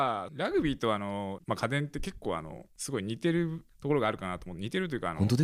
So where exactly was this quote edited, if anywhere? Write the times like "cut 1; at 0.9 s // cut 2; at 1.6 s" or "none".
cut 1; at 1.4 s